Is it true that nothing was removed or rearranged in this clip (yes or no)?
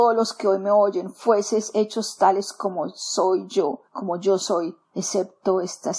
no